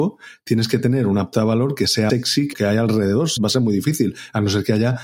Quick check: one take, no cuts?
no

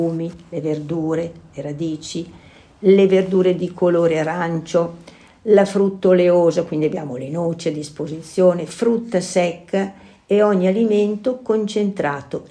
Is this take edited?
no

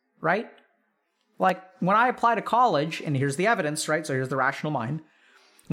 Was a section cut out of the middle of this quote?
no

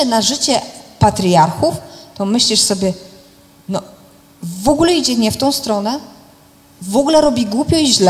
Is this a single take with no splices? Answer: yes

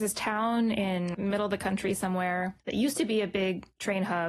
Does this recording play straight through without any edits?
no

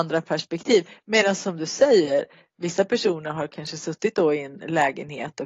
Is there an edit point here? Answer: no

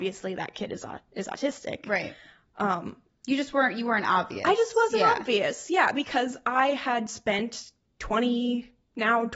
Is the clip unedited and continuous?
yes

